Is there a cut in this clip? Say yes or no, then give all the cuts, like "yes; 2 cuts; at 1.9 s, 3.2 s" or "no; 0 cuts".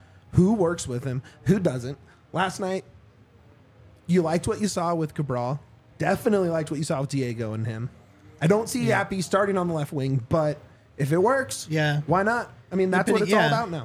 no; 0 cuts